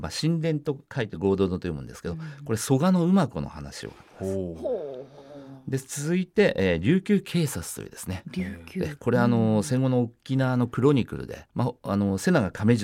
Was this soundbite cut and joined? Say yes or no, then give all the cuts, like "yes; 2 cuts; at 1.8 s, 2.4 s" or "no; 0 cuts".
yes; 1 cut; at 11.5 s